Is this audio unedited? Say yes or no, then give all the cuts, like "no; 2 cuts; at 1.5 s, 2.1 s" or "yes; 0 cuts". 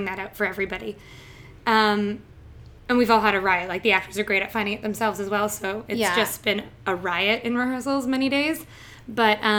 yes; 0 cuts